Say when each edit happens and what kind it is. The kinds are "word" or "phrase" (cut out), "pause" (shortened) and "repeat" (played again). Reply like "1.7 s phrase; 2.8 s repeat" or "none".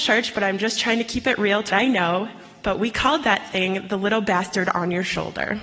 1.7 s word